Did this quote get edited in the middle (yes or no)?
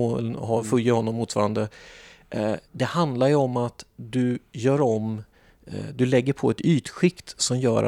yes